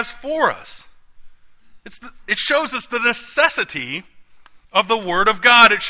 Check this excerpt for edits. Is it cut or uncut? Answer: cut